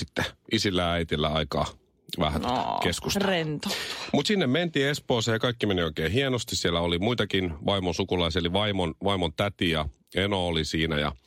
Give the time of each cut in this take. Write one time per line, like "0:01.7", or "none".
none